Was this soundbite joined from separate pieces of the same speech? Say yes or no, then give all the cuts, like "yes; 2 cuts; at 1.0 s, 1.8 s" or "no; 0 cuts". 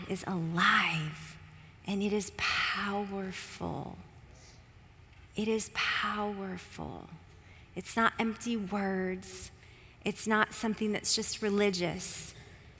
no; 0 cuts